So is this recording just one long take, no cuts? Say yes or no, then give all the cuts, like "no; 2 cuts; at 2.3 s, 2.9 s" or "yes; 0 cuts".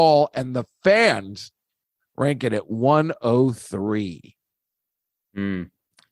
yes; 0 cuts